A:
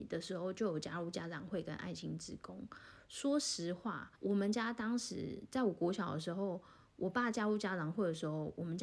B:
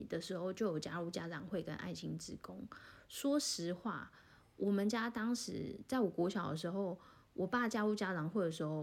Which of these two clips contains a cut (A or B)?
A